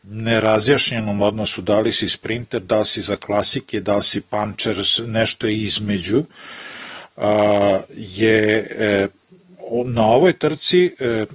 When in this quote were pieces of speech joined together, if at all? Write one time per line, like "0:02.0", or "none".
none